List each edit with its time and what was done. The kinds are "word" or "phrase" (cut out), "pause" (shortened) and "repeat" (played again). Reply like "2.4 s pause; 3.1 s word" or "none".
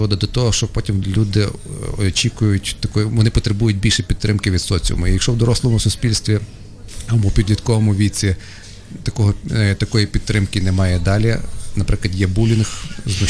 1.0 s word